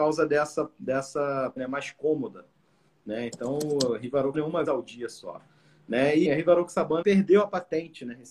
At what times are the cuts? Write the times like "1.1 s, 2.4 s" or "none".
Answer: 1.6 s, 4.3 s, 4.6 s, 6.2 s, 7.0 s